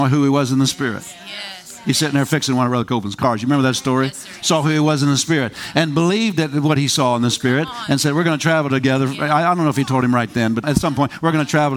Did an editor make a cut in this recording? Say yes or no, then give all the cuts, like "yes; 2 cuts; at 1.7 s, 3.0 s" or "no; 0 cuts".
yes; 1 cut; at 10.6 s